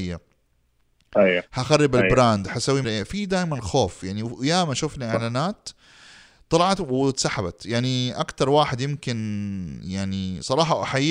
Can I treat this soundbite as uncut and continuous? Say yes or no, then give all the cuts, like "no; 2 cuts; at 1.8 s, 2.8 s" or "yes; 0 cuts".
no; 1 cut; at 2.8 s